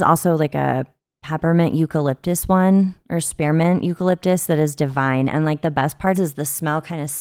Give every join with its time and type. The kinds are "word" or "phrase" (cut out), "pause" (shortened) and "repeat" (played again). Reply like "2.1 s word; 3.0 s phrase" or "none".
6.1 s word